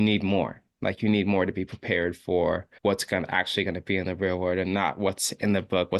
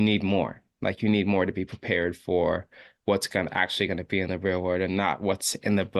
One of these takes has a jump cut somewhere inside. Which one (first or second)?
first